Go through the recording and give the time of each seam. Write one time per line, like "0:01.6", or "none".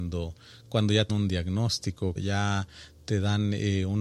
0:01.1
0:02.2

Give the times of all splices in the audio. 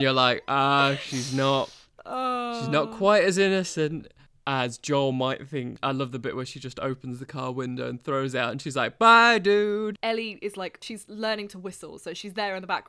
0:04.3

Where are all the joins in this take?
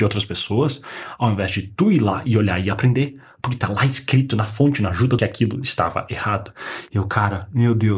0:05.2

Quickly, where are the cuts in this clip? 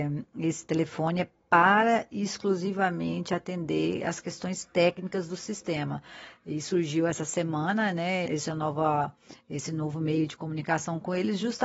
0:08.3

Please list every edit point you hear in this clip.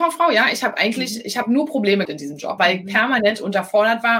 0:02.0
0:02.6

